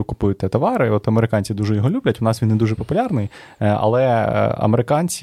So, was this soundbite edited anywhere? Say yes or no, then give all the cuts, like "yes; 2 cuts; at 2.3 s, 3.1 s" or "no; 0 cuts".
no; 0 cuts